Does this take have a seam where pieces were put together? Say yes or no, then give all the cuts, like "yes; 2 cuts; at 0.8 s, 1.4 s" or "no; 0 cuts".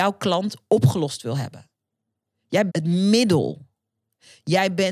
yes; 1 cut; at 2.7 s